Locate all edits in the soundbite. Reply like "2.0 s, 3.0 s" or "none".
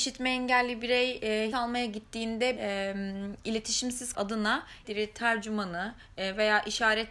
1.5 s, 2.6 s, 4.1 s, 4.8 s